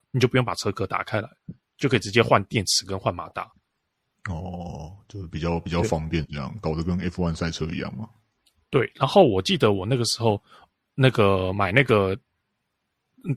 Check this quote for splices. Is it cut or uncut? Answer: uncut